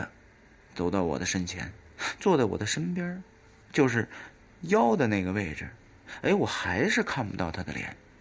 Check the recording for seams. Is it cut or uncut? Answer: uncut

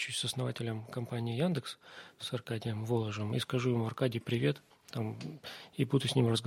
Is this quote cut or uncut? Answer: cut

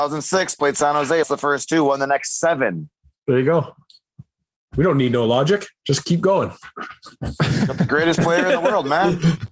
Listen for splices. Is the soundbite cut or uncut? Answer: cut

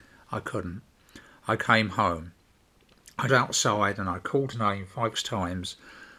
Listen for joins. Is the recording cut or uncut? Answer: cut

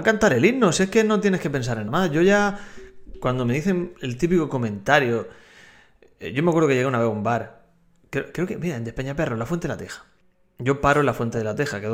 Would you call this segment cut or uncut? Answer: cut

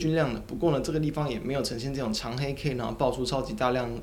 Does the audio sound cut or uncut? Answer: uncut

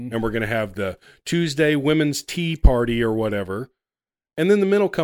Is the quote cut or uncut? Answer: uncut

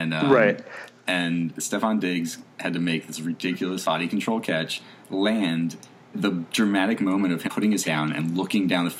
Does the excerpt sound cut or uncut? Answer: cut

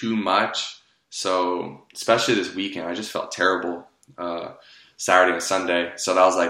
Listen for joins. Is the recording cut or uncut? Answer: uncut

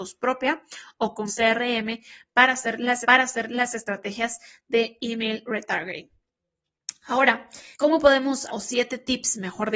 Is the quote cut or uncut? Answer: cut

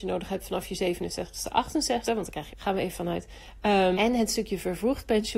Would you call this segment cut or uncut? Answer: cut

